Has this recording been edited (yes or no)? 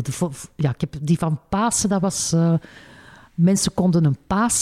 no